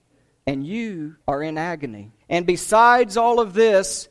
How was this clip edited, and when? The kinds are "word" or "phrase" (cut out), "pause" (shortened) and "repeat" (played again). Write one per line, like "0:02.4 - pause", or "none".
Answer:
0:01.2 - pause
0:02.2 - pause